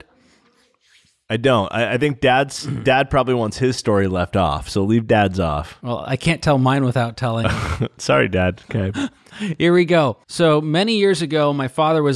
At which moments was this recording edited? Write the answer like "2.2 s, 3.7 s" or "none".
10.2 s